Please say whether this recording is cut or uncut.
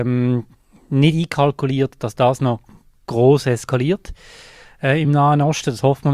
uncut